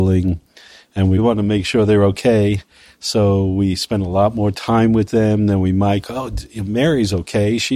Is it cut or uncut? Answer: uncut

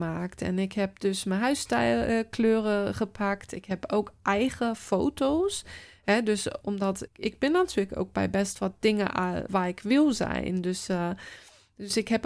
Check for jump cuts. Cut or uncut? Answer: cut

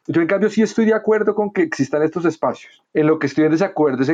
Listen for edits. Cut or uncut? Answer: uncut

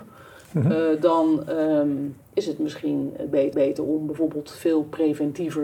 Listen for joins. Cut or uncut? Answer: cut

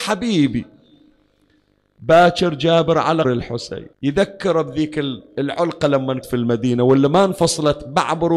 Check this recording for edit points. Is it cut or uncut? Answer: cut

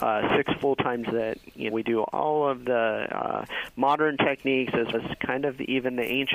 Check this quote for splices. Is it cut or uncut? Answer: cut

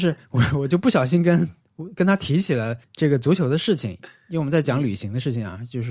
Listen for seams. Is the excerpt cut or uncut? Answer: cut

